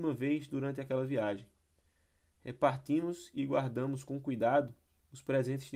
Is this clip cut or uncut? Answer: uncut